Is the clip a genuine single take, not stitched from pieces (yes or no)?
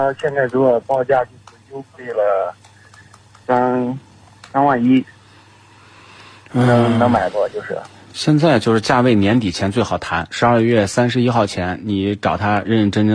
yes